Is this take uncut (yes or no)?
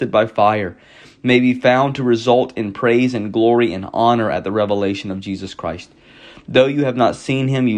yes